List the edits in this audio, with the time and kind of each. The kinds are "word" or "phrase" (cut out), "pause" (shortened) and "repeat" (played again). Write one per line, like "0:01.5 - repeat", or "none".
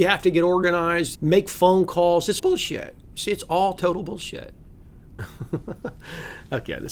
0:01.1 - word
0:02.4 - word